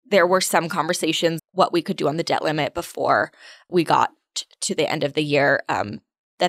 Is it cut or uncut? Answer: cut